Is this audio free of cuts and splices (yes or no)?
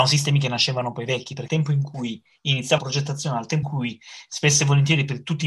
no